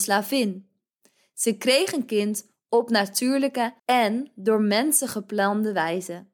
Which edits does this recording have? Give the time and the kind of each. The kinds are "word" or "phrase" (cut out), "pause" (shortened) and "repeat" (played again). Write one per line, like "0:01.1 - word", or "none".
0:03.8 - pause